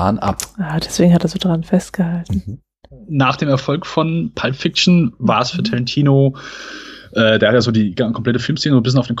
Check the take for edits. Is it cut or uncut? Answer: uncut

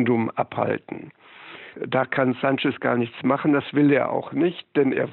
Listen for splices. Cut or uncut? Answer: uncut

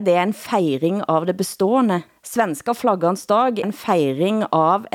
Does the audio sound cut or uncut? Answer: cut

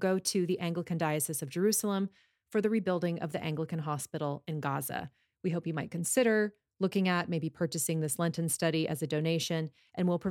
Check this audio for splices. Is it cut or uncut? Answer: uncut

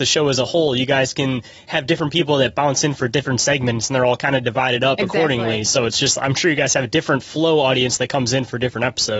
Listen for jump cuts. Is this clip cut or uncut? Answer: uncut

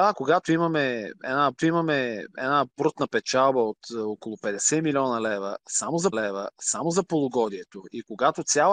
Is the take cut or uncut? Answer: cut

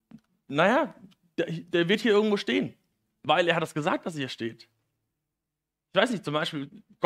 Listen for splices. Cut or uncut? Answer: uncut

